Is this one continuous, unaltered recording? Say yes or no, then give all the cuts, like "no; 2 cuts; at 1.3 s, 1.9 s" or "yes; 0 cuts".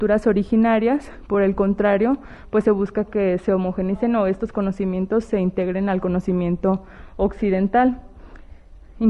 yes; 0 cuts